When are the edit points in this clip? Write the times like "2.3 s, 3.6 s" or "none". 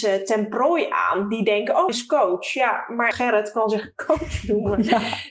1.9 s, 3.1 s